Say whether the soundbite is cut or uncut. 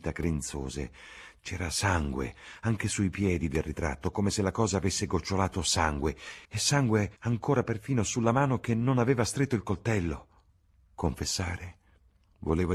cut